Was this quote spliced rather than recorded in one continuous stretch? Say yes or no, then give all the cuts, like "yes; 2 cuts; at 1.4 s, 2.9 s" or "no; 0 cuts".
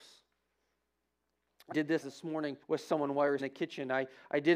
yes; 4 cuts; at 1.7 s, 2.0 s, 2.6 s, 3.4 s